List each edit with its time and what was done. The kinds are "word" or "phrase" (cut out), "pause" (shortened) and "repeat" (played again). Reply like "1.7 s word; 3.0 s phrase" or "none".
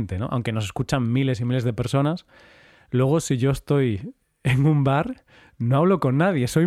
none